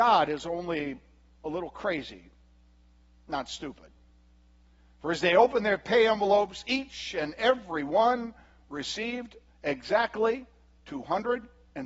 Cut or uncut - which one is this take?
uncut